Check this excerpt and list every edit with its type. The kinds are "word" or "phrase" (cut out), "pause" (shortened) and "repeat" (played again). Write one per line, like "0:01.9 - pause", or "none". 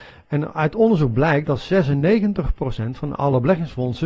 none